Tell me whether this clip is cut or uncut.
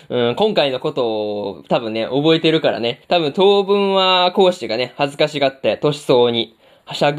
cut